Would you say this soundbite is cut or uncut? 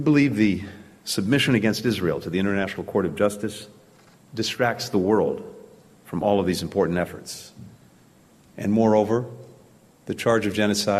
uncut